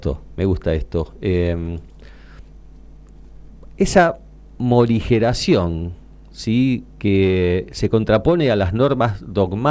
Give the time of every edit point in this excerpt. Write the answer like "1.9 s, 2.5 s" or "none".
none